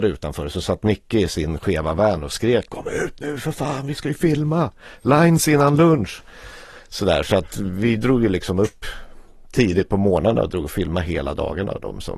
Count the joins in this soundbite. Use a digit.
1